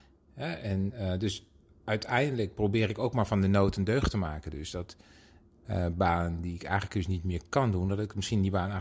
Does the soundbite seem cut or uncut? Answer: uncut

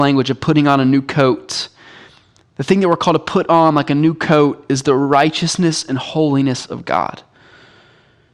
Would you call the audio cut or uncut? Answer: uncut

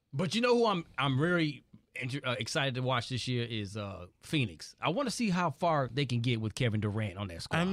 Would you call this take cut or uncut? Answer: uncut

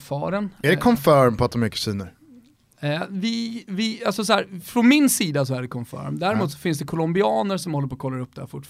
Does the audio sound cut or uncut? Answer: uncut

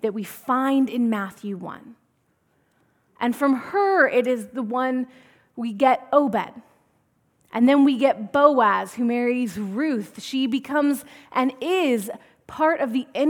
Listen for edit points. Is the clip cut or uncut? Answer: uncut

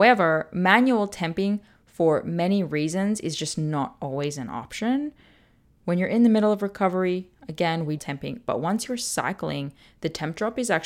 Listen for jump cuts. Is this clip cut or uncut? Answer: cut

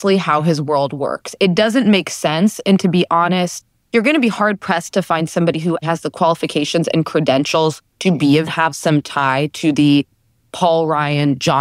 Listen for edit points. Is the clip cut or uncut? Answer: cut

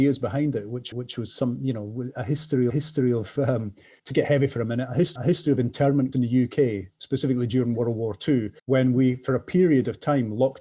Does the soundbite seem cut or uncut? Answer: cut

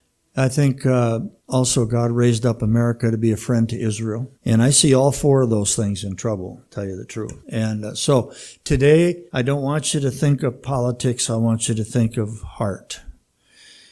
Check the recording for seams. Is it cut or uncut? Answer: cut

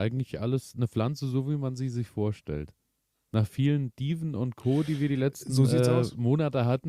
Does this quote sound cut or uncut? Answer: uncut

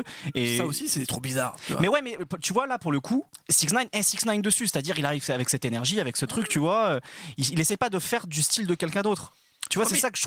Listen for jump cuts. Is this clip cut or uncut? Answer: cut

